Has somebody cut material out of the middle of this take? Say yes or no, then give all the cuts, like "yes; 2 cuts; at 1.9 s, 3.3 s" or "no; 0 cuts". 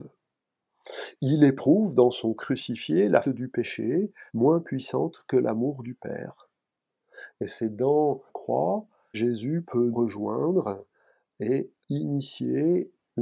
yes; 7 cuts; at 2.4 s, 3.2 s, 4.3 s, 8.3 s, 9.1 s, 9.9 s, 11.8 s